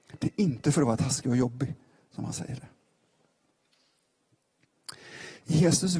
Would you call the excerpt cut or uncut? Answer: uncut